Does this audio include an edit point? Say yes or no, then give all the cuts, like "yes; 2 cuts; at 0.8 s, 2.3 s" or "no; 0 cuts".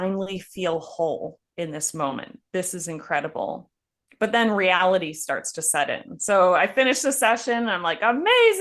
yes; 1 cut; at 3.9 s